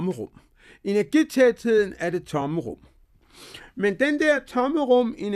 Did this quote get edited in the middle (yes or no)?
no